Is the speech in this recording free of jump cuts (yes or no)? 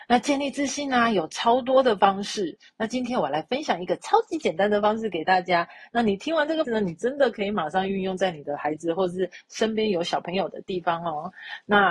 no